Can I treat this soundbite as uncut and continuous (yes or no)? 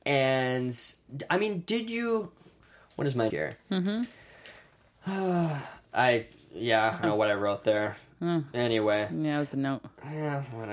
no